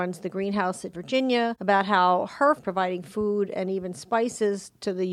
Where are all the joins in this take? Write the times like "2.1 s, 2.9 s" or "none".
0.9 s, 2.6 s